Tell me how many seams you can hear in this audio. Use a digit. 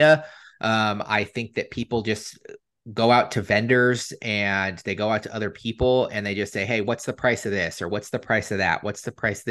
0